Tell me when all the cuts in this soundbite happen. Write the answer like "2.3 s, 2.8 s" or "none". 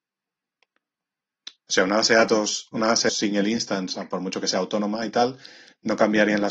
3.1 s

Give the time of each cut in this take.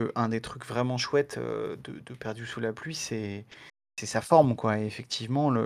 none

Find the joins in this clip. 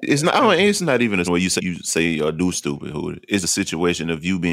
1.2 s, 1.6 s, 2.5 s, 3.4 s

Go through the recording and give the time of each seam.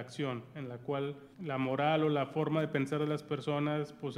1.3 s

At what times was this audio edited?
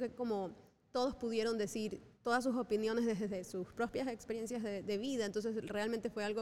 2.1 s

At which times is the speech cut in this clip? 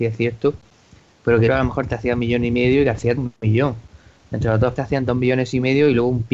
1.5 s, 3.2 s, 4.8 s

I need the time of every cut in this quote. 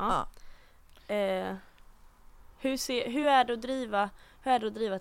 none

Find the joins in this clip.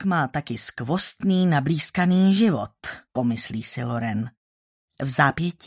3.1 s

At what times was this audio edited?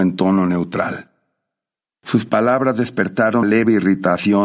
3.4 s

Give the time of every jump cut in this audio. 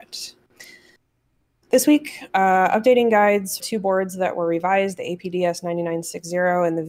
3.6 s

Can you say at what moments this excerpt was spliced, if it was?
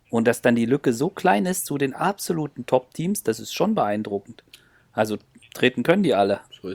none

